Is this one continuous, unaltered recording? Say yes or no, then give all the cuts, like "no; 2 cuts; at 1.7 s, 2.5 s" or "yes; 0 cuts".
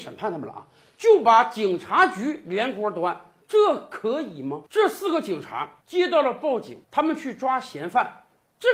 no; 4 cuts; at 3.4 s, 4.7 s, 5.8 s, 6.8 s